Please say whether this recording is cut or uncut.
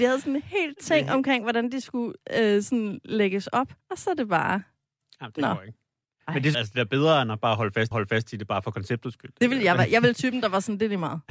cut